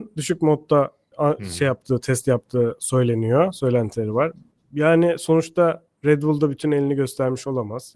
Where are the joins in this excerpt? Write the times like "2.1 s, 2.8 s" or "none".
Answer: none